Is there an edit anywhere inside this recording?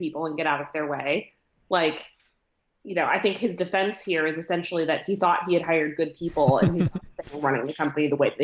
no; 0 cuts

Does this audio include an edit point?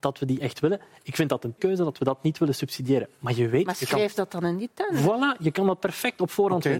yes; 1 cut; at 1.6 s

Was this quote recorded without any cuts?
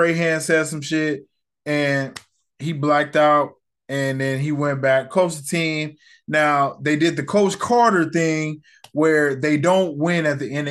yes; 0 cuts

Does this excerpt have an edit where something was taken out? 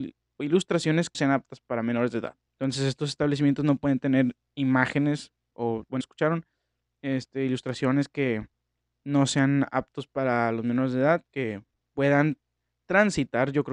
yes; 4 cuts; at 1.1 s, 2.5 s, 6.0 s, 11.8 s

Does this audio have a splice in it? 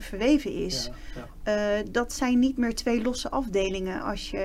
no; 0 cuts

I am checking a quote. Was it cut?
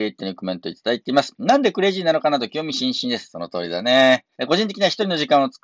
yes; 1 cut; at 4.3 s

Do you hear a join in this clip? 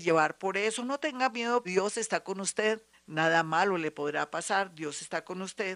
yes; 2 cuts; at 1.6 s, 2.9 s

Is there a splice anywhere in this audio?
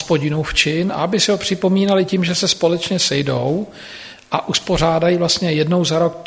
no; 0 cuts

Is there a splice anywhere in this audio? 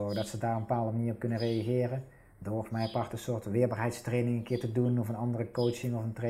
no; 0 cuts

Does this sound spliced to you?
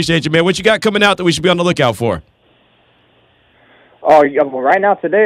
no; 0 cuts

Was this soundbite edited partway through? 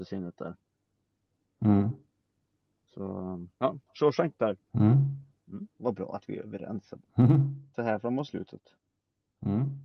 yes; 4 cuts; at 3.5 s, 4.6 s, 5.7 s, 7.0 s

